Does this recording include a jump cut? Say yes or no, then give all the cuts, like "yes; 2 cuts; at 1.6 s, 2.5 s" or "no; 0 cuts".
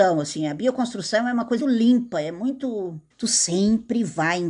yes; 2 cuts; at 1.6 s, 3.1 s